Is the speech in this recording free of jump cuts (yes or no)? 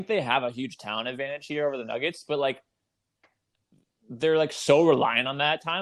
yes